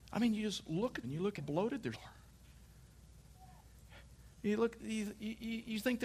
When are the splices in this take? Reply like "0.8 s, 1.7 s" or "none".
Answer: 1.0 s, 1.4 s, 1.9 s, 4.8 s